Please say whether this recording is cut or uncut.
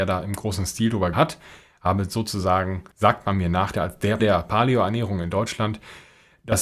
cut